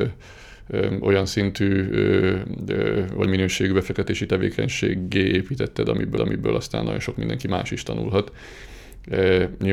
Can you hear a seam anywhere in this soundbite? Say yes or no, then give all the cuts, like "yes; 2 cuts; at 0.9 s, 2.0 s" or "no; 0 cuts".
yes; 2 cuts; at 3.3 s, 6.2 s